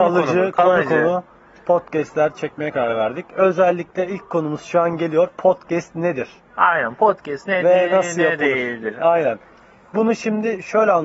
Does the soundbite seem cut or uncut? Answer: uncut